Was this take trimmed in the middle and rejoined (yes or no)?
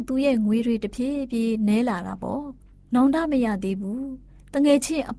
no